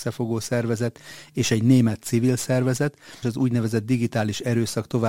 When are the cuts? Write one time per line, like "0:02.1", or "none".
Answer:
0:03.2